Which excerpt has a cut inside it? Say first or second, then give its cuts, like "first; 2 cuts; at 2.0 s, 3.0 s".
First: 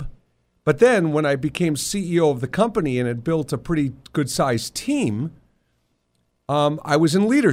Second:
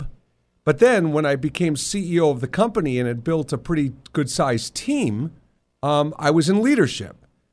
second; 1 cut; at 5.6 s